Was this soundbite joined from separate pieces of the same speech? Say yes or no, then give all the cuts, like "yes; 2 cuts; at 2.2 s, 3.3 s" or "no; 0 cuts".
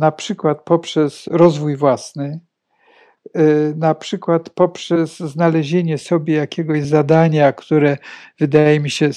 no; 0 cuts